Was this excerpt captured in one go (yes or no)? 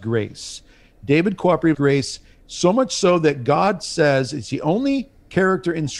no